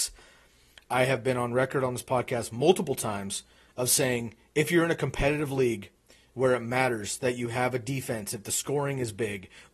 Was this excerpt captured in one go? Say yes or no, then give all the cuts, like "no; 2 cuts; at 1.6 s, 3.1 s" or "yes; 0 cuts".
yes; 0 cuts